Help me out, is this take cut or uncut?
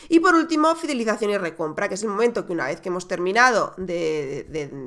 uncut